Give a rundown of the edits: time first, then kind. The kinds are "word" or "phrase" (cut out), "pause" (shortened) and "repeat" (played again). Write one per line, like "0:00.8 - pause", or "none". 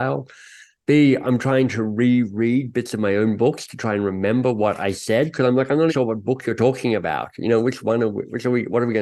0:05.9 - word